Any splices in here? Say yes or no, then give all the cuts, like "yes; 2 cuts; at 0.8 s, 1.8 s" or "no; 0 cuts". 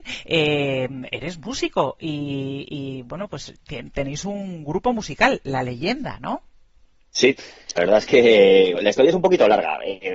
yes; 2 cuts; at 7.8 s, 8.8 s